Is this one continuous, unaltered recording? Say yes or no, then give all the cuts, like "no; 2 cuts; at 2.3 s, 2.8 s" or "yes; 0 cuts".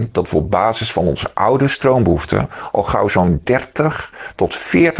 yes; 0 cuts